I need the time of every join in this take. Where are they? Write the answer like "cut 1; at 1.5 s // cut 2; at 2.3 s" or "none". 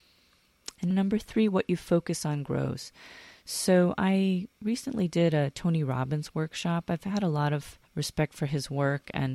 cut 1; at 0.9 s // cut 2; at 7.9 s